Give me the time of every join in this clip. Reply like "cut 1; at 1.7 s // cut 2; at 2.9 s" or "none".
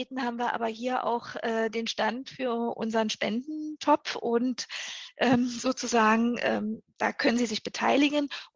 none